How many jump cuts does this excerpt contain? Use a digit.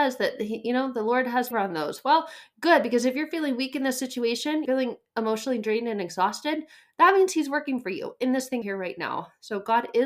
3